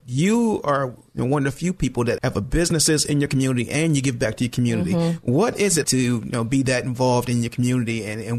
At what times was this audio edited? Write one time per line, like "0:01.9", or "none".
0:02.2
0:05.8